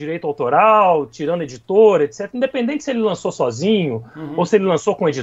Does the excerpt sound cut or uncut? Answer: uncut